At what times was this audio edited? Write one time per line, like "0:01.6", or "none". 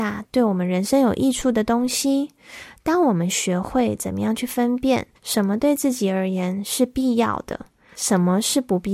0:05.2